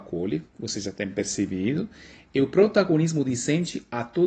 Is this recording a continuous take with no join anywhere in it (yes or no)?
yes